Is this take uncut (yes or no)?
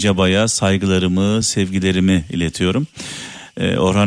yes